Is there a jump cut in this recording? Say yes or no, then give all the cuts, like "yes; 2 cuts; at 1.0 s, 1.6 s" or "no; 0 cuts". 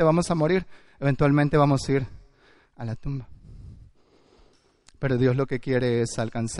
no; 0 cuts